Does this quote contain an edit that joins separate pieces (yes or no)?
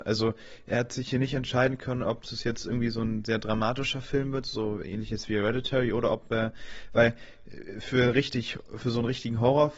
no